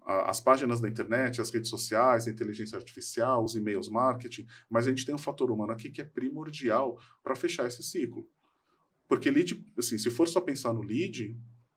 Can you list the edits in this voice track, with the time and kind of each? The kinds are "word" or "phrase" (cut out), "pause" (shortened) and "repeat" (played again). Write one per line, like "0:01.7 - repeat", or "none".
none